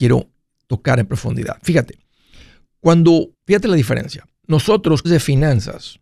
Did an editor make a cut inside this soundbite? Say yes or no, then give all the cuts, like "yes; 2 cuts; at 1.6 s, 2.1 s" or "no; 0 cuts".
yes; 3 cuts; at 3.3 s, 4.3 s, 5.0 s